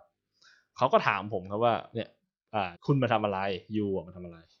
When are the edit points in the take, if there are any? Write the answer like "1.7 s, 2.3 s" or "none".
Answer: 2.7 s